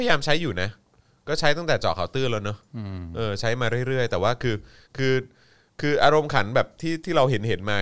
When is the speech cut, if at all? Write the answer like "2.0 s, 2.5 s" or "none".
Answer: none